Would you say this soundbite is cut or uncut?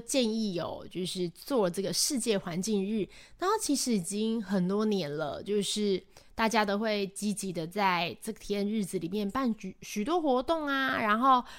uncut